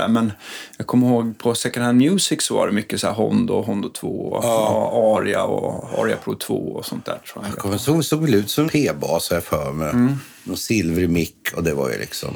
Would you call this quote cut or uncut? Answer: cut